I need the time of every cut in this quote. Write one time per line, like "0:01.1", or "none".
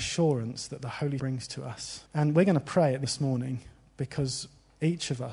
0:01.2
0:02.1
0:03.0